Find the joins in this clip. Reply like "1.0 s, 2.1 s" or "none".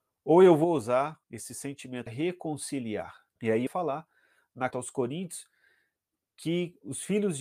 1.2 s, 2.1 s, 3.3 s, 3.7 s, 4.7 s